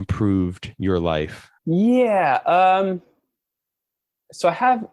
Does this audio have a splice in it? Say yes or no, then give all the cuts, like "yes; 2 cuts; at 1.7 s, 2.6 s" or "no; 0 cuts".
yes; 1 cut; at 1.6 s